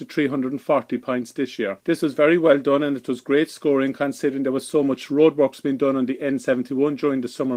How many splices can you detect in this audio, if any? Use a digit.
1